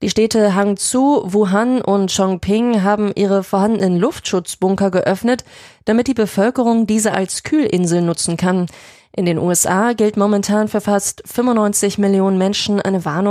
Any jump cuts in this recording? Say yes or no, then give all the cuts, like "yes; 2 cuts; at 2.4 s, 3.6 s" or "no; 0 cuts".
no; 0 cuts